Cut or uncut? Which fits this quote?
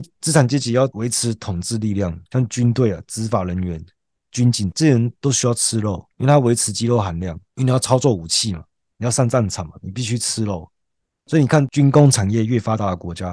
cut